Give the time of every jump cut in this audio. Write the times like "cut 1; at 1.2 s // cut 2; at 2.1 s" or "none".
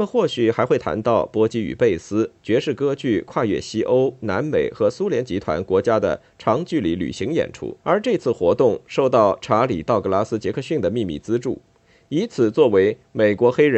cut 1; at 2.4 s // cut 2; at 7.8 s